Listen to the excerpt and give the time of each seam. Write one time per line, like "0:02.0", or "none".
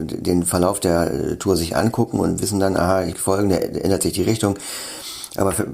0:03.1